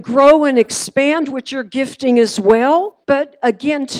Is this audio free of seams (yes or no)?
no